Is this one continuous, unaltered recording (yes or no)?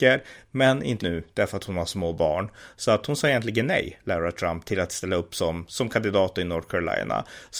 no